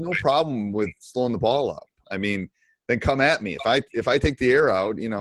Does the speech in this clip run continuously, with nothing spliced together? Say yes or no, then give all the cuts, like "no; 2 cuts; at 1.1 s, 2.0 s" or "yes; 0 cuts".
yes; 0 cuts